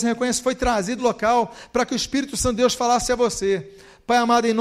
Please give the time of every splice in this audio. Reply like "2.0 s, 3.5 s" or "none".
1.0 s

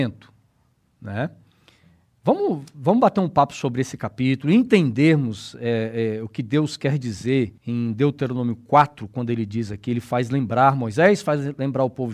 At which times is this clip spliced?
7.6 s

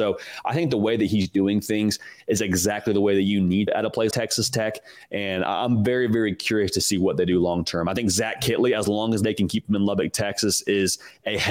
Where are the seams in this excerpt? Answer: 3.7 s, 4.1 s

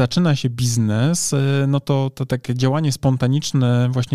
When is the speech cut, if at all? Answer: none

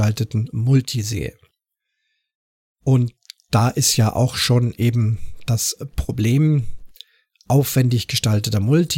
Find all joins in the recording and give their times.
none

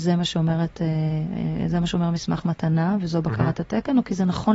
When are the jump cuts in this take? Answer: none

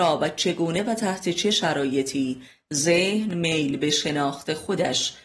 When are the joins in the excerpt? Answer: none

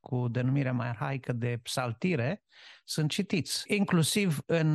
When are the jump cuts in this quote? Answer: none

